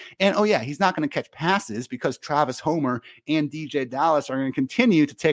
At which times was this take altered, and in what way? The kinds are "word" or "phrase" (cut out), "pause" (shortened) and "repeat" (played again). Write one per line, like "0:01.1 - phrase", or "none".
none